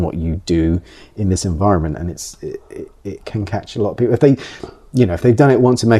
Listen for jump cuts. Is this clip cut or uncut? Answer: uncut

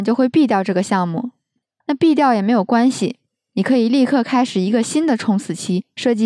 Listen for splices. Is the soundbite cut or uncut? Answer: uncut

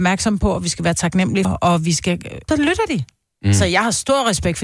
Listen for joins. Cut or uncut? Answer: cut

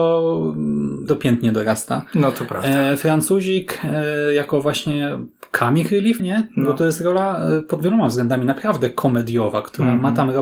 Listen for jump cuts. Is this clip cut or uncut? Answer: cut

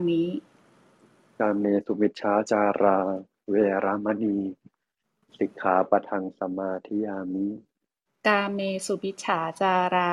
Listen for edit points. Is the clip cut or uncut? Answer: uncut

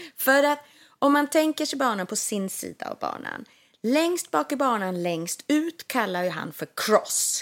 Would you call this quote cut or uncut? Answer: uncut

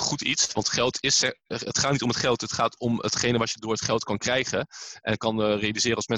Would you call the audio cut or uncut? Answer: uncut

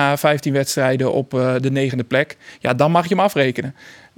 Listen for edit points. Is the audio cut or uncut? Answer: uncut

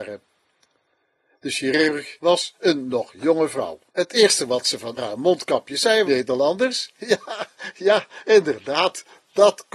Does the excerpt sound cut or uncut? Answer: cut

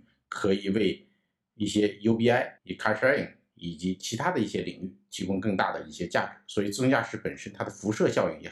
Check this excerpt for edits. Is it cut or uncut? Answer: cut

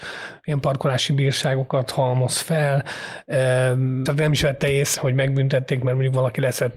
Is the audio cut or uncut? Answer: cut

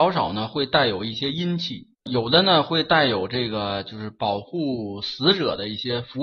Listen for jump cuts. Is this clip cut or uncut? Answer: cut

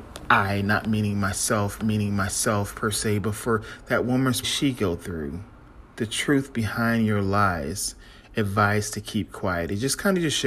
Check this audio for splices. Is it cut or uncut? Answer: cut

